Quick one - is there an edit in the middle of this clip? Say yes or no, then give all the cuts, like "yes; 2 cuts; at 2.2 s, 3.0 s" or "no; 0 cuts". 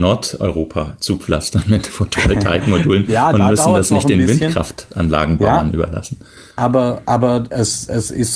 yes; 1 cut; at 6.5 s